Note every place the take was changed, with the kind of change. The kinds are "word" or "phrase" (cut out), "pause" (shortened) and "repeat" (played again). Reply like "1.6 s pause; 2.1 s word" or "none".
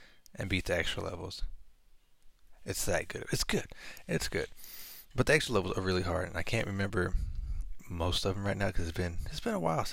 none